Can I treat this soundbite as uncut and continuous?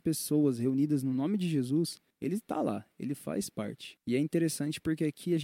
yes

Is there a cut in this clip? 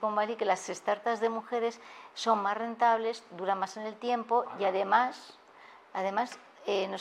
no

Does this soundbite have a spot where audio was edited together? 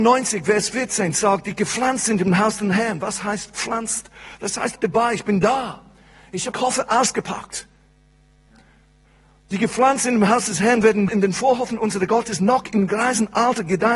yes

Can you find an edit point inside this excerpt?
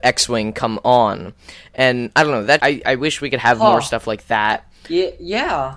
yes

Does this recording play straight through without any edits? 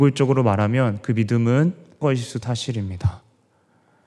no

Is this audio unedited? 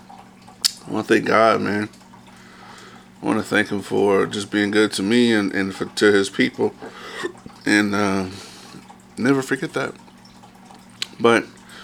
no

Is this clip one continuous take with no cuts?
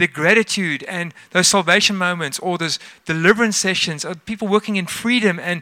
yes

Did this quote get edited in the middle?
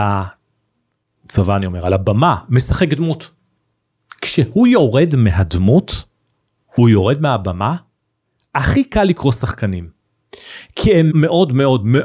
yes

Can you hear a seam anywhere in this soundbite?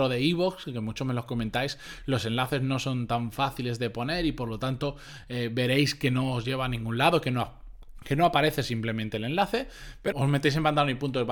yes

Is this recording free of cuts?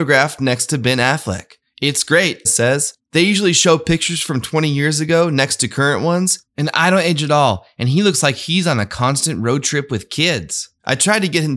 no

